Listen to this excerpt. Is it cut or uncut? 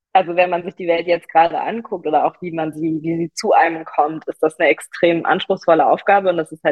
uncut